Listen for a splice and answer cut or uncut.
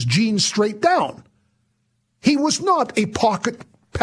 uncut